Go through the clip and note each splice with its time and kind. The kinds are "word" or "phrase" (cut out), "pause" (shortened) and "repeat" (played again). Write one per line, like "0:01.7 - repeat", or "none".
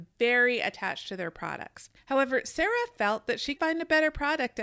0:02.0 - pause
0:03.6 - word